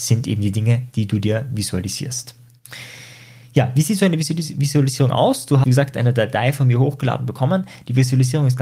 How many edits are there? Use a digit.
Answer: 1